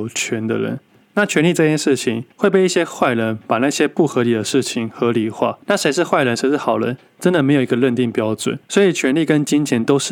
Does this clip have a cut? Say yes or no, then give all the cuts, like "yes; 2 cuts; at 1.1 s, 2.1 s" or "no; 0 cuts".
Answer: yes; 3 cuts; at 2.3 s, 5.6 s, 8.6 s